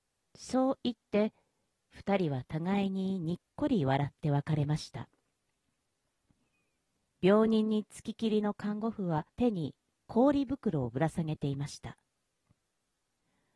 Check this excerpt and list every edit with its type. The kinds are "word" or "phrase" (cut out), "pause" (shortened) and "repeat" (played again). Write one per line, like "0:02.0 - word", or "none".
0:09.3 - pause